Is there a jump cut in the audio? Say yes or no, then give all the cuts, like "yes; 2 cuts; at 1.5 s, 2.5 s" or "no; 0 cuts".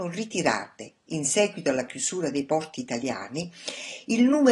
no; 0 cuts